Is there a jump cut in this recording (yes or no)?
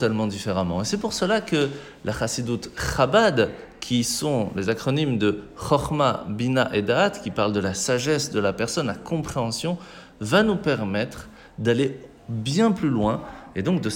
no